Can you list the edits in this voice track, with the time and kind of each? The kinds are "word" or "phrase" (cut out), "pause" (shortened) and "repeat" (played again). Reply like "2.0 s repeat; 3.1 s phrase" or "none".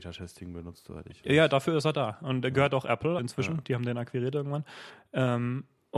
3.2 s word